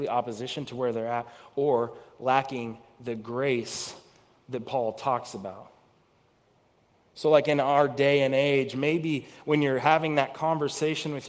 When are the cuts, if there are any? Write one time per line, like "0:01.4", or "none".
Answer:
none

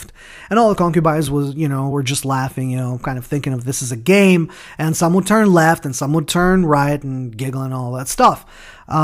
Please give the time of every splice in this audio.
none

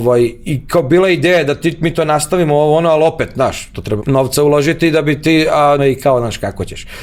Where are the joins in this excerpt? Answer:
0:04.0
0:05.8

